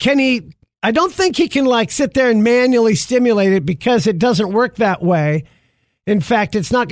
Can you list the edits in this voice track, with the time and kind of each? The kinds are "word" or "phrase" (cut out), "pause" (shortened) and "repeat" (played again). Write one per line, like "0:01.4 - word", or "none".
none